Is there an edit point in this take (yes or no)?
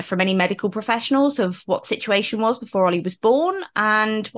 no